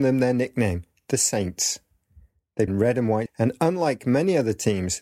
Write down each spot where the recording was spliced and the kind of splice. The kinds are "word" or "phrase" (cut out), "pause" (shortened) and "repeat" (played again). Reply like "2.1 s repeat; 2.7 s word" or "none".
2.7 s word; 3.3 s word